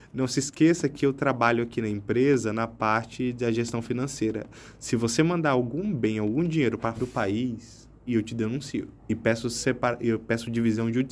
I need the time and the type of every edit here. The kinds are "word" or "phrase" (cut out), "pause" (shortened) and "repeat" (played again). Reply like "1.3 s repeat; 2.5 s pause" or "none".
7.0 s word; 8.1 s phrase; 9.0 s pause